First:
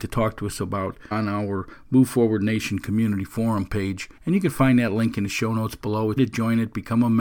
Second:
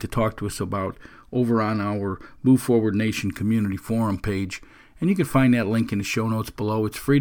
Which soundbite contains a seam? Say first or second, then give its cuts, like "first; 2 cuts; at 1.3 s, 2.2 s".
first; 3 cuts; at 1.1 s, 4.2 s, 6.2 s